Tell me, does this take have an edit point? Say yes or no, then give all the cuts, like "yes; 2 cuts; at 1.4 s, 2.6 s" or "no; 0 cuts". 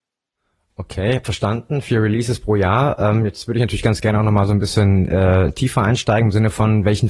no; 0 cuts